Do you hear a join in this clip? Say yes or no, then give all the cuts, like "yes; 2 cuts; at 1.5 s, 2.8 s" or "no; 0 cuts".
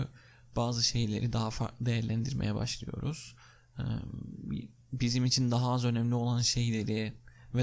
no; 0 cuts